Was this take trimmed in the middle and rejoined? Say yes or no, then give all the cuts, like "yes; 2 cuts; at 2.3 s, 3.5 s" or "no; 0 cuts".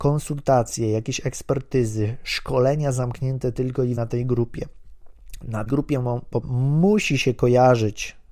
yes; 3 cuts; at 4.0 s, 5.7 s, 6.4 s